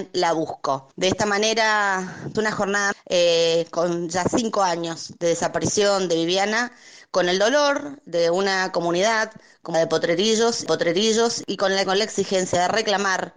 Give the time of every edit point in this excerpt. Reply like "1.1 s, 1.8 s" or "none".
0.9 s, 2.3 s, 2.9 s, 9.7 s, 10.7 s, 11.8 s